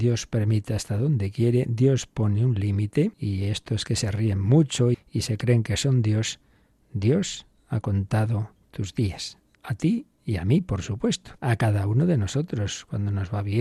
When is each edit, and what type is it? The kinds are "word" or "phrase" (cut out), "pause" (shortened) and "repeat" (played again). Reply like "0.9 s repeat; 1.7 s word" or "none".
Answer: 3.1 s pause; 4.9 s word; 9.6 s pause; 11.4 s pause